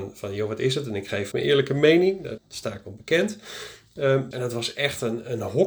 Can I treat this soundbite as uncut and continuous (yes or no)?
no